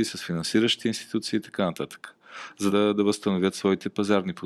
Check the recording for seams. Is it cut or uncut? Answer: cut